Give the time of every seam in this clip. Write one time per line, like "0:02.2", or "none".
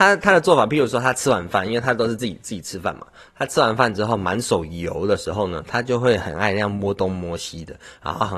none